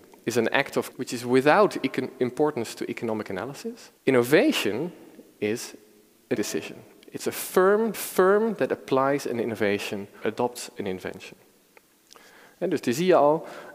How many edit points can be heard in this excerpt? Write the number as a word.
five